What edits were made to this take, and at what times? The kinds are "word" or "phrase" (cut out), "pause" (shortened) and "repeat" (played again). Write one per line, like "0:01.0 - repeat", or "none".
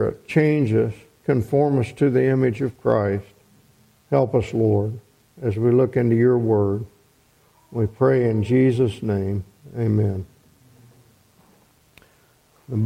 none